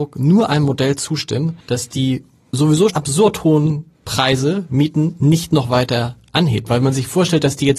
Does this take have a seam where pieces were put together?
yes; 2 cuts; at 1.6 s, 2.9 s

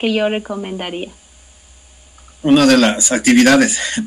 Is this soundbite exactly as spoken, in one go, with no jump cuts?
yes; 0 cuts

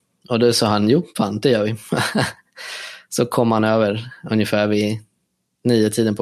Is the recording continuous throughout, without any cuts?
yes; 0 cuts

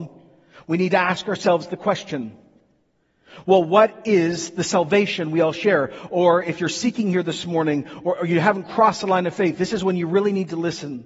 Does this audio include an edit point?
no; 0 cuts

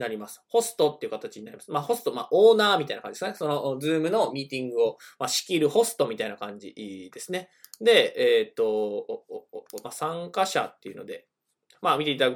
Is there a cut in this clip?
no; 0 cuts

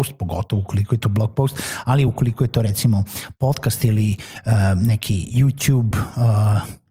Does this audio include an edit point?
no; 0 cuts

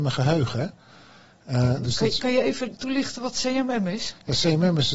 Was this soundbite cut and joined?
no; 0 cuts

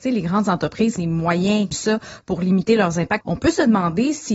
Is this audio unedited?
no; 3 cuts; at 1.0 s, 1.7 s, 3.2 s

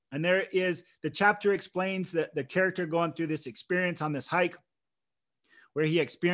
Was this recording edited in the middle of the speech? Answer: no; 0 cuts

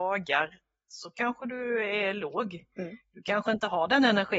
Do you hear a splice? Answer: no; 0 cuts

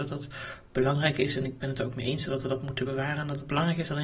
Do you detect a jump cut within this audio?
no; 0 cuts

